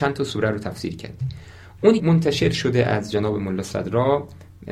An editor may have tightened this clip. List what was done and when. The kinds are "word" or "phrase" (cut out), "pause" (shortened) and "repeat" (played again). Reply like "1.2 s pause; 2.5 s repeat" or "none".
2.0 s word